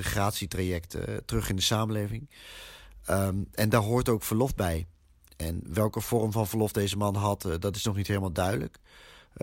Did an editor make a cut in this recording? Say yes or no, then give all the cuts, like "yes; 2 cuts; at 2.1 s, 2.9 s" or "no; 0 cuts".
no; 0 cuts